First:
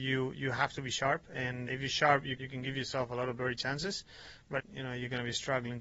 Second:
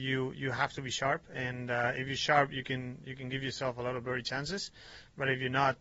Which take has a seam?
first; 3 cuts; at 1.7 s, 2.4 s, 4.6 s

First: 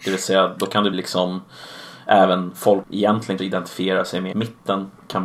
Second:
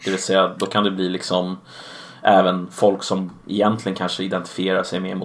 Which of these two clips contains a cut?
first; 4 cuts; at 0.9 s, 2.8 s, 3.4 s, 4.3 s

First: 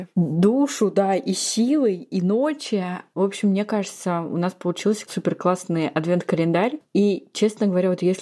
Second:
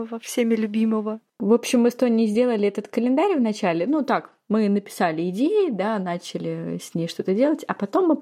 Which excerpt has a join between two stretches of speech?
first; 1 cut; at 5.1 s

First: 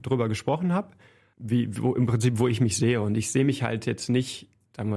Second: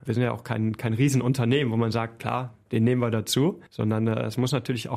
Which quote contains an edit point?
second; 1 cut; at 3.7 s

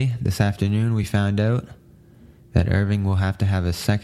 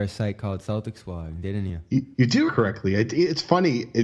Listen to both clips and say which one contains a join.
second; 2 cuts; at 2.1 s, 2.5 s

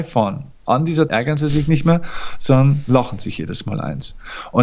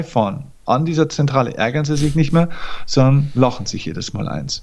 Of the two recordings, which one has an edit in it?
first; 1 cut; at 1.1 s

